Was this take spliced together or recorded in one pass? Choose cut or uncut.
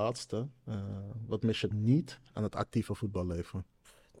cut